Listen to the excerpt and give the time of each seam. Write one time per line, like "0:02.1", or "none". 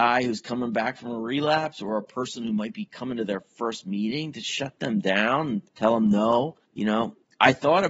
0:05.7
0:06.7